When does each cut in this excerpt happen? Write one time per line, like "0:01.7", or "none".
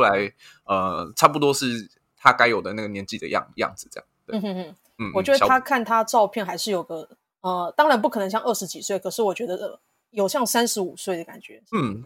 none